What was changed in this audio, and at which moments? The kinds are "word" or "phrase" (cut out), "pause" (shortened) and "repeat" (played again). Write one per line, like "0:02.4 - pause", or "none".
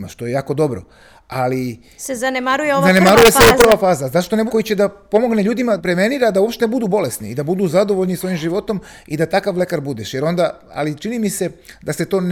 0:04.5 - phrase
0:05.8 - word